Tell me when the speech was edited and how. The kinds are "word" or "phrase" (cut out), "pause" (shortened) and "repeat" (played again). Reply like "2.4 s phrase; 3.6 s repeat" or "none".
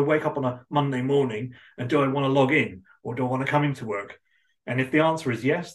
none

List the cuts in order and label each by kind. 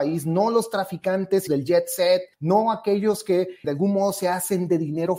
1.5 s word; 2.3 s pause; 3.6 s word

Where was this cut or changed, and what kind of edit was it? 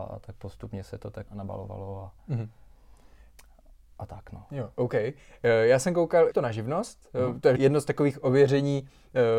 1.3 s word; 6.3 s word; 7.6 s word

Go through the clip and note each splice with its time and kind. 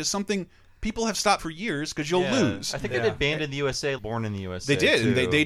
1.4 s word; 4.0 s word

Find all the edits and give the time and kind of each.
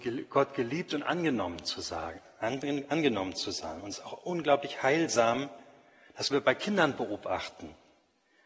3.9 s word; 6.3 s word

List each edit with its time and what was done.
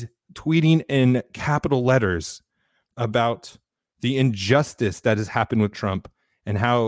5.7 s word

